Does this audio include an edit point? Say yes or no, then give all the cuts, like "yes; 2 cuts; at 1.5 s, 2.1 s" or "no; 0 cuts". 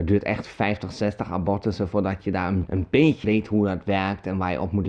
yes; 2 cuts; at 2.7 s, 3.2 s